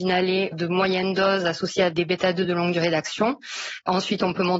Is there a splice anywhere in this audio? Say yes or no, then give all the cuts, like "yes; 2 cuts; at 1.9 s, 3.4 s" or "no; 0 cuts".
no; 0 cuts